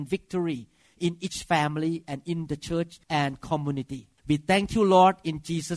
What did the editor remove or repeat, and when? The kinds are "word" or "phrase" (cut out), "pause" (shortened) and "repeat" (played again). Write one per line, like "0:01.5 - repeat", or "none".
0:03.0 - pause
0:04.2 - pause